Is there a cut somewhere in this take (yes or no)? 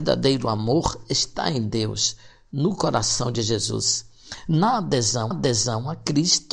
yes